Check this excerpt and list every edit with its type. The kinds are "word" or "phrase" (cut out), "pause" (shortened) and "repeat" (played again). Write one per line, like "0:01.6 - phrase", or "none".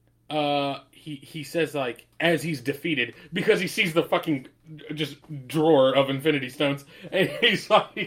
0:02.1 - pause